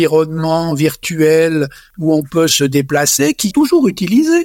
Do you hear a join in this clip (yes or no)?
yes